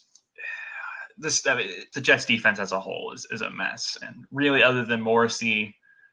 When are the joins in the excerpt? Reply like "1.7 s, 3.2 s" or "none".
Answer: 1.9 s